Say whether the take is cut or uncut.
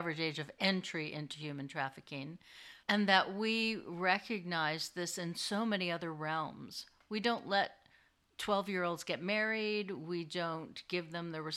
cut